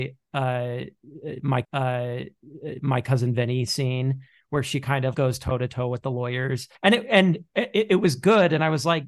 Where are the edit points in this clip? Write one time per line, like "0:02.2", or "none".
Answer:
0:01.6
0:05.1
0:06.8